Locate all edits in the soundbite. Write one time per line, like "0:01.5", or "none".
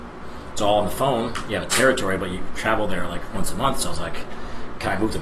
none